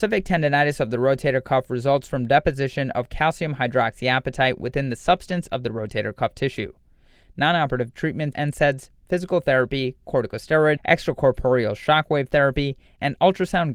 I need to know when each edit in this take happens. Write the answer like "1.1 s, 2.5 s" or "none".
8.3 s, 10.8 s